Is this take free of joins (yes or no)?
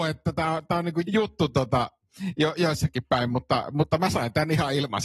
no